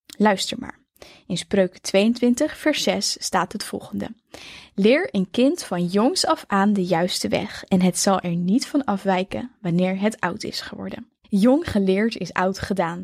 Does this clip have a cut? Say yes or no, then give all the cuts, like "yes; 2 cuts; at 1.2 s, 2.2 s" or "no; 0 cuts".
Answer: yes; 1 cut; at 11.2 s